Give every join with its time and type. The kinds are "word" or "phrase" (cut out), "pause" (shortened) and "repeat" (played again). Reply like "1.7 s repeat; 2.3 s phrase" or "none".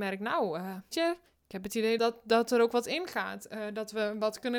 0.9 s word; 1.3 s pause; 2.0 s word